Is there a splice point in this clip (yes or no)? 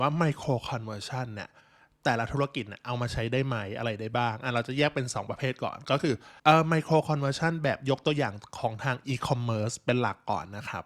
yes